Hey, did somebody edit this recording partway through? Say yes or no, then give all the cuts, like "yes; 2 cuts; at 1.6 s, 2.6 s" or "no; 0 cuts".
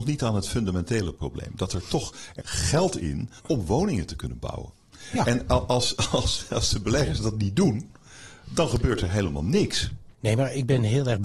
yes; 3 cuts; at 2.4 s, 3.4 s, 10.1 s